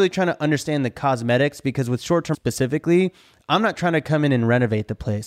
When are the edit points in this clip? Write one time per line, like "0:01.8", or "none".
0:02.3